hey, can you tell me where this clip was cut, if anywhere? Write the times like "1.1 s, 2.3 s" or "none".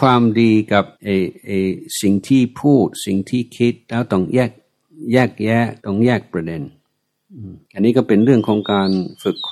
0.9 s, 5.8 s, 7.6 s